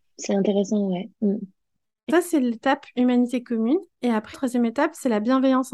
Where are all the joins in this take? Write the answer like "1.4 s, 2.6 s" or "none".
2.1 s, 4.3 s